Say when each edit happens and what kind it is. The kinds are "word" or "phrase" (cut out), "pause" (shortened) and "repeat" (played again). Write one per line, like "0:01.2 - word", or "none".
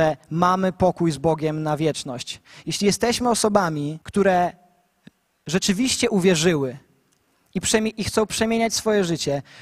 0:04.0 - pause